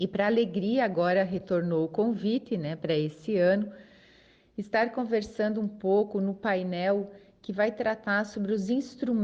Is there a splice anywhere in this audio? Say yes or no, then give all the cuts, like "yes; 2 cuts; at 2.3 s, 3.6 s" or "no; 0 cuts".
no; 0 cuts